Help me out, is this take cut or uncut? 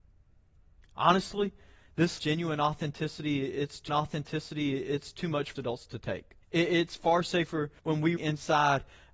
cut